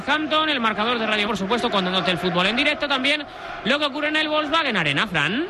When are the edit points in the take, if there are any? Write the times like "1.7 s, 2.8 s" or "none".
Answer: 1.2 s

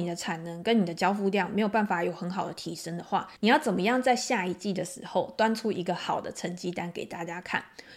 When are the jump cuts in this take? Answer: 3.4 s

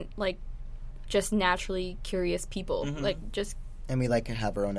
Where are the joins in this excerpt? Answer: 1.0 s

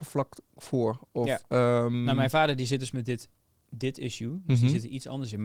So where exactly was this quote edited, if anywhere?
2.9 s

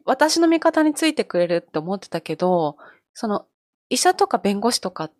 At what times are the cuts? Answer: none

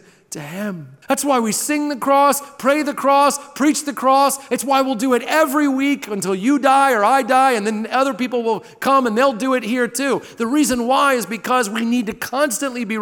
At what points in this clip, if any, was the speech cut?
1.0 s

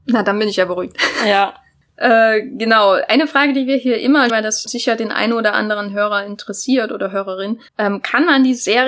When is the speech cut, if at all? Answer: 4.3 s, 4.7 s, 7.7 s

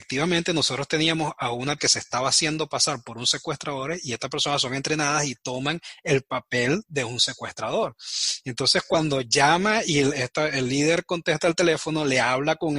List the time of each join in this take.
1.8 s

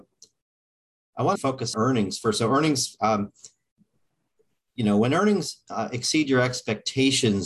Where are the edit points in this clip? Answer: 1.4 s, 1.7 s

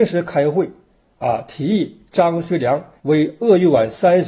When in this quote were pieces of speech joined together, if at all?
3.0 s

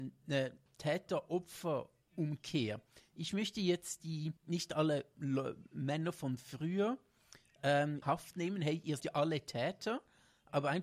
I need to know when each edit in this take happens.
4.4 s, 8.0 s, 9.0 s

